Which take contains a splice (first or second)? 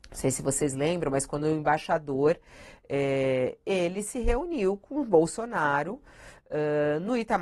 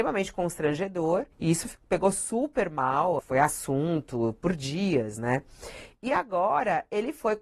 second